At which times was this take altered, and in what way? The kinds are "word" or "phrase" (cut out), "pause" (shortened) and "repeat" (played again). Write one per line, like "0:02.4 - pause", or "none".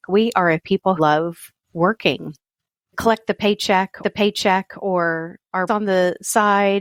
0:01.0 - word
0:02.9 - phrase
0:04.0 - repeat
0:05.7 - word

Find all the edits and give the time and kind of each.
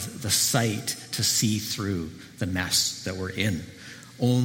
none

